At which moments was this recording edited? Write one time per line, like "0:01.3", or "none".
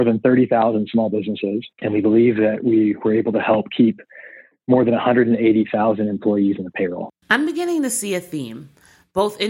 0:01.7
0:07.2